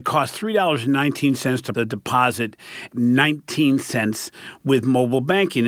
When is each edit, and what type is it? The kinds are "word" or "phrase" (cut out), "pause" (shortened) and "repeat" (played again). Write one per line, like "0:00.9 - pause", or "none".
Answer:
0:01.7 - word
0:02.9 - phrase